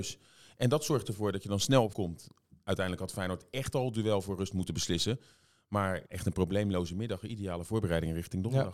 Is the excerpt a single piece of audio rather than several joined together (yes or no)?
no